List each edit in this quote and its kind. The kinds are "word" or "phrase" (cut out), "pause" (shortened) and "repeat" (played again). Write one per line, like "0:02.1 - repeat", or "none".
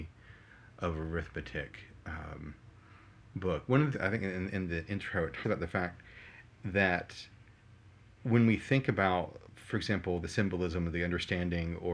0:03.9 - word
0:05.4 - word
0:10.2 - word